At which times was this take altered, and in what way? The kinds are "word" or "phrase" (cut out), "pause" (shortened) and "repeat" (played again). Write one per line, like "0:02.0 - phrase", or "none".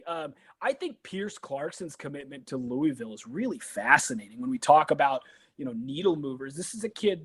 none